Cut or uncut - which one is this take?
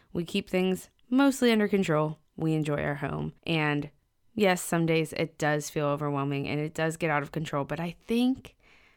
cut